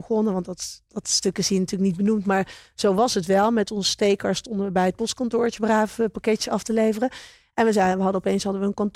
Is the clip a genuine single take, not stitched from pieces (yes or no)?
yes